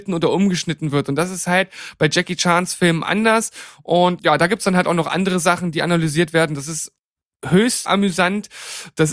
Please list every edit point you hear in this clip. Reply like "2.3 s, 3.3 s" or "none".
4.2 s, 7.8 s